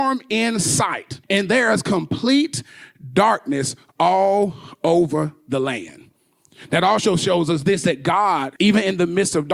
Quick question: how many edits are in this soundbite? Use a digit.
2